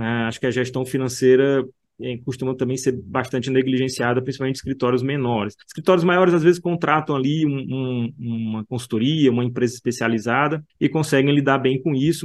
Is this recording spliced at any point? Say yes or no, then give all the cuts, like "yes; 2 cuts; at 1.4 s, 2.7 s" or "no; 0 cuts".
yes; 2 cuts; at 5.6 s, 10.7 s